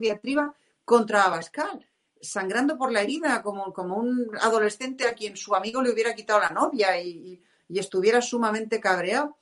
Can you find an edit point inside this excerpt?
no; 0 cuts

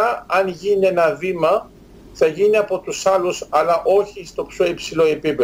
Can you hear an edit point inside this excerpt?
no; 0 cuts

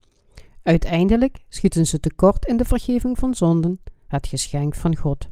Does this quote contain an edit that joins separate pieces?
no; 0 cuts

